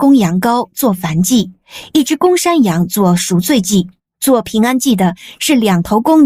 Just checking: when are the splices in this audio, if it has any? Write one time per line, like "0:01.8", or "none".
0:04.0